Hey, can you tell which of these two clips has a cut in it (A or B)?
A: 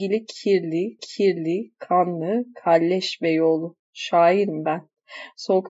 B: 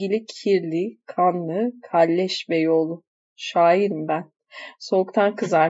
A